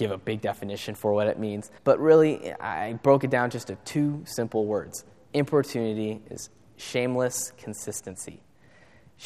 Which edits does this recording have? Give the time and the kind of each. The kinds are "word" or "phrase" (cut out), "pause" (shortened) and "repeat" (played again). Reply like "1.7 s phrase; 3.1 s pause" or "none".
1.8 s pause